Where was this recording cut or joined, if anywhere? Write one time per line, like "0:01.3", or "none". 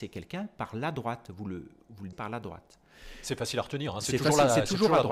0:02.1